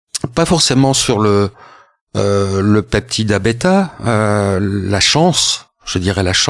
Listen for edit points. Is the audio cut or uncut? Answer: uncut